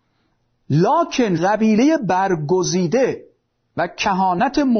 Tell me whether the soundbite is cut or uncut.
cut